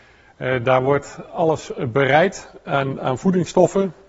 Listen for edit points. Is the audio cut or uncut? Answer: uncut